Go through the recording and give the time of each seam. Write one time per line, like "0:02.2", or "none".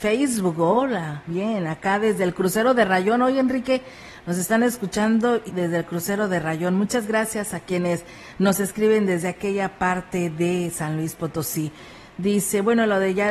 0:01.3
0:05.5
0:07.5